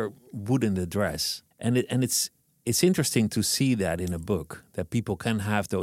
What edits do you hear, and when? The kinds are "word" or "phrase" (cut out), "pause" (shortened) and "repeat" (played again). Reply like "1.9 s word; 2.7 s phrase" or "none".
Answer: 1.5 s pause; 2.4 s pause